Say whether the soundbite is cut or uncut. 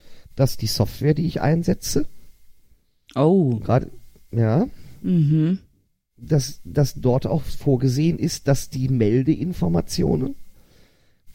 uncut